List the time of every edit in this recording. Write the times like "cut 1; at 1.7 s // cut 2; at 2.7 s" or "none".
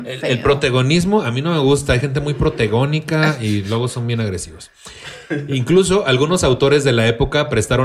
none